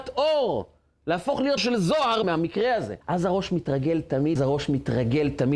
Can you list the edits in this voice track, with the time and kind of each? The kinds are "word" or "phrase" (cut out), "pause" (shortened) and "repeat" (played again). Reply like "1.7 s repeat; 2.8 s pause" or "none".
1.6 s word; 2.2 s word; 3.0 s pause; 4.4 s phrase